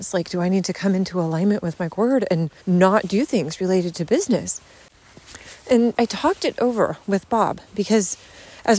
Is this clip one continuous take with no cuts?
no; 3 cuts; at 1.9 s, 2.6 s, 5.9 s

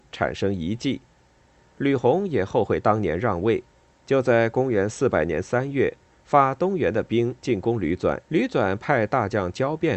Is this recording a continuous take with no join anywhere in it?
no; 2 cuts; at 3.9 s, 8.2 s

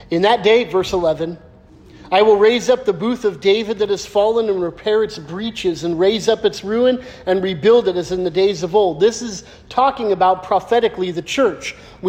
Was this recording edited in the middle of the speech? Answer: no; 0 cuts

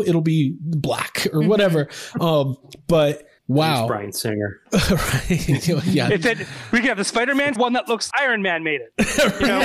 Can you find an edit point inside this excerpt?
yes; 3 cuts; at 3.4 s, 7.6 s, 8.1 s

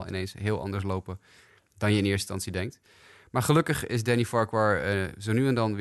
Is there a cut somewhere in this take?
no; 0 cuts

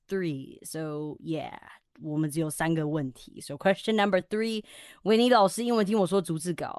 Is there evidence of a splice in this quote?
no; 0 cuts

